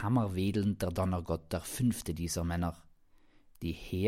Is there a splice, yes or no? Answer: no